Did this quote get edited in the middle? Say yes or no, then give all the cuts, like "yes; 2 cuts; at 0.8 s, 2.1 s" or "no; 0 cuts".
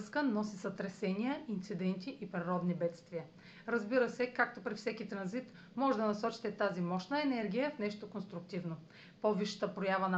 no; 0 cuts